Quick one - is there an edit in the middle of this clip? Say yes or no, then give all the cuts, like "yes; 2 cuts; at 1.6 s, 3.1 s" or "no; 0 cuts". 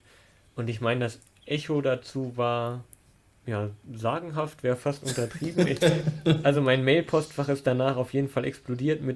no; 0 cuts